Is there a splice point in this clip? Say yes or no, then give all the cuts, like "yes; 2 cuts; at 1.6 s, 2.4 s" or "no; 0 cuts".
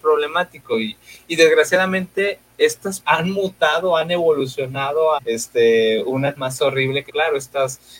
yes; 4 cuts; at 3.0 s, 5.2 s, 6.4 s, 7.1 s